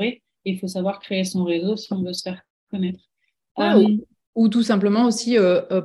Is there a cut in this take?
no; 0 cuts

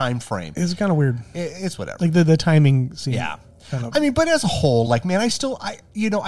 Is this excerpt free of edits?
yes; 0 cuts

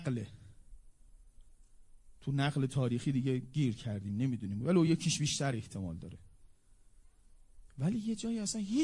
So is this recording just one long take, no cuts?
yes; 0 cuts

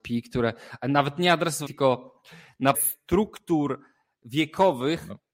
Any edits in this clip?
yes; 2 cuts; at 1.7 s, 2.7 s

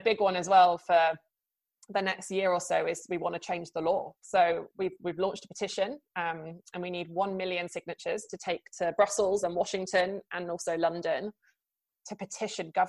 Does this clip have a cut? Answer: yes; 1 cut; at 4.2 s

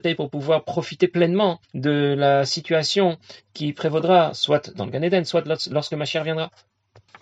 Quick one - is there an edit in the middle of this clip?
yes; 1 cut; at 1.6 s

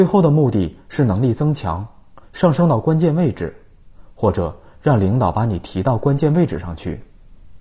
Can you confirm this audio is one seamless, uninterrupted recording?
no; 1 cut; at 2.2 s

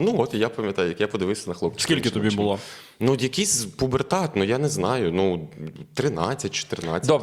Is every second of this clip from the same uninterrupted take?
yes; 0 cuts

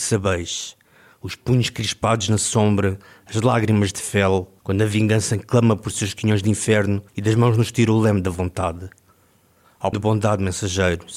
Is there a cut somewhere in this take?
yes; 3 cuts; at 4.6 s, 7.1 s, 9.9 s

